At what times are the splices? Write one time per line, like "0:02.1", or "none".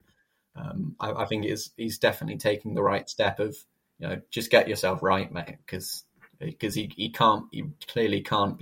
none